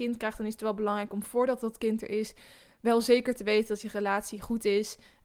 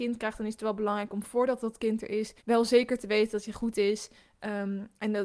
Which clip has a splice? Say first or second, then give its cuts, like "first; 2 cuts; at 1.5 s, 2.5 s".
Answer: second; 2 cuts; at 2.4 s, 3.5 s